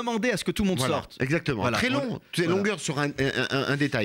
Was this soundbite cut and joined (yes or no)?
no